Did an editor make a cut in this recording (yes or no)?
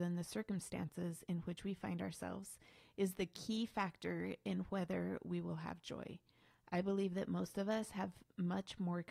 no